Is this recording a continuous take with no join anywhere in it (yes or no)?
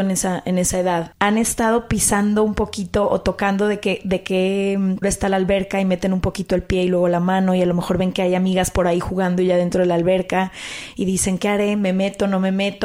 no